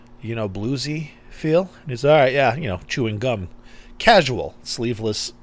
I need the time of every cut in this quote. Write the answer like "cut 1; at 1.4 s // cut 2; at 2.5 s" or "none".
none